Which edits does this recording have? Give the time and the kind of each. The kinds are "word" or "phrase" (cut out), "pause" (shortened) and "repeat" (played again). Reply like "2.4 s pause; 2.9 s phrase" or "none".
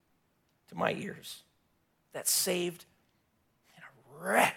none